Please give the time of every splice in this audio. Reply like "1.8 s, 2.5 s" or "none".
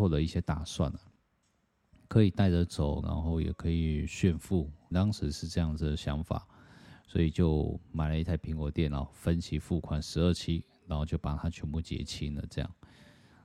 3.0 s, 4.9 s